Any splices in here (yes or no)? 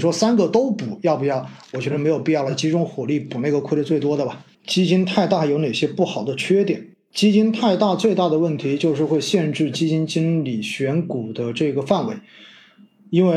yes